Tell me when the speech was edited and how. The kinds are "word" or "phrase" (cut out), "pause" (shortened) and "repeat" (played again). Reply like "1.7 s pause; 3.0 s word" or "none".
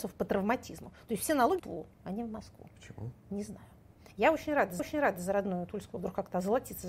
1.6 s phrase; 1.9 s pause; 2.7 s pause; 4.8 s repeat; 6.0 s phrase